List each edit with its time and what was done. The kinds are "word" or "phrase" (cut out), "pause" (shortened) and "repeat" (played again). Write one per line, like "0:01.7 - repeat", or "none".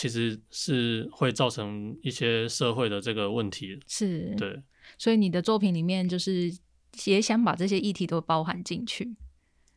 none